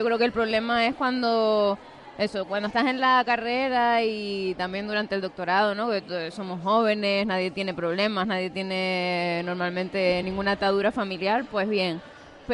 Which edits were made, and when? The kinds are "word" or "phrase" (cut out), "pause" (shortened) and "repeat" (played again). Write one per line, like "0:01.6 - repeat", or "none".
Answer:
none